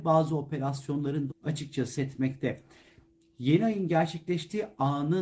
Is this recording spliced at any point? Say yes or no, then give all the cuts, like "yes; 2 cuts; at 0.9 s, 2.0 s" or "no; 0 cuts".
yes; 2 cuts; at 1.3 s, 2.0 s